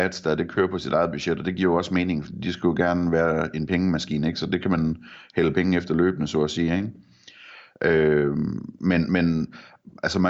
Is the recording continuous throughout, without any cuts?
yes; 0 cuts

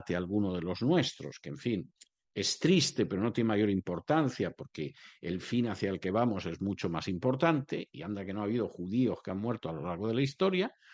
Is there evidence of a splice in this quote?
no; 0 cuts

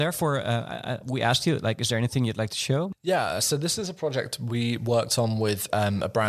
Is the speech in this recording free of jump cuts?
yes; 0 cuts

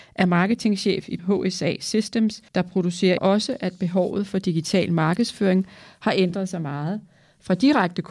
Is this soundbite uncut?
no; 3 cuts; at 1.2 s, 2.5 s, 3.2 s

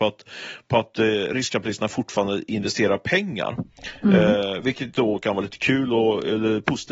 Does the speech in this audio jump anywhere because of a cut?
no; 0 cuts

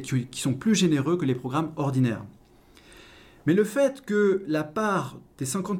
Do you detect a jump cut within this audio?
no; 0 cuts

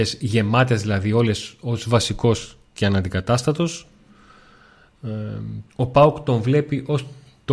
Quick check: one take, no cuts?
no; 2 cuts; at 2.7 s, 5.7 s

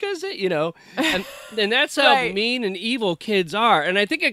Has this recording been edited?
no; 0 cuts

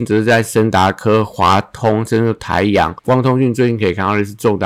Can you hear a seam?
yes; 1 cut; at 3.0 s

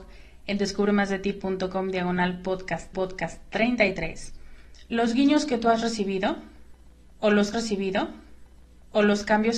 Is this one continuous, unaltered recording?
no; 2 cuts; at 2.9 s, 7.5 s

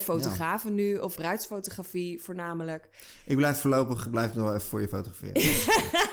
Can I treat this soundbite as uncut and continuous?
no; 1 cut; at 1.2 s

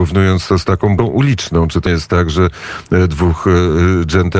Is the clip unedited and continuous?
no; 2 cuts; at 1.0 s, 1.9 s

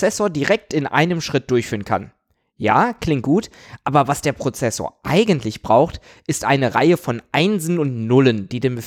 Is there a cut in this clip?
no; 0 cuts

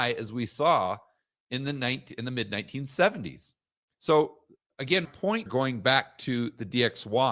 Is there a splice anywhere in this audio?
yes; 2 cuts; at 5.0 s, 5.5 s

